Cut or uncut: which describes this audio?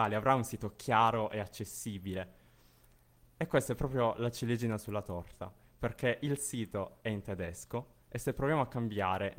uncut